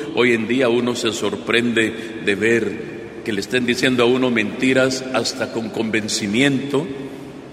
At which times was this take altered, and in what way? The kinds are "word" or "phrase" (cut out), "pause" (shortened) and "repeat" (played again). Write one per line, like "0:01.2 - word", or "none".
none